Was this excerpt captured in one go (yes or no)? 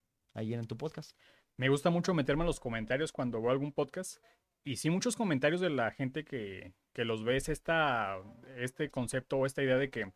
yes